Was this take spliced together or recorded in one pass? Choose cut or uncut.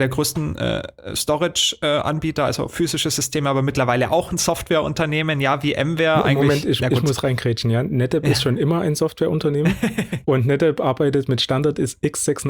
uncut